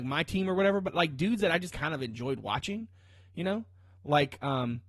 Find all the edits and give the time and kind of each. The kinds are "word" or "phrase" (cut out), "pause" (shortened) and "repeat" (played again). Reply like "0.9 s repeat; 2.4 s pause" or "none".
1.7 s word